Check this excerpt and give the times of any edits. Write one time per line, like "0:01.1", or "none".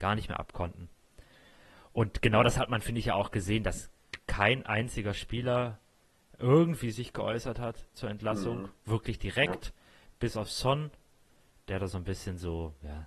none